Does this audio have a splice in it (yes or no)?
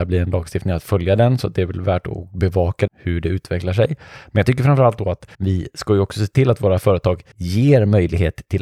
yes